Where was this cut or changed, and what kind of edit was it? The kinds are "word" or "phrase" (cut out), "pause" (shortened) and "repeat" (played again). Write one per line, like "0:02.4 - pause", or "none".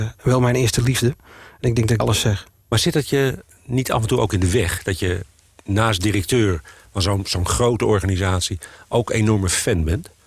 0:02.0 - word